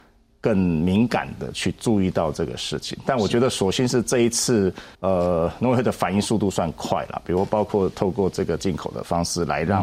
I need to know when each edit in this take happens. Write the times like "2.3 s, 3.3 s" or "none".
4.9 s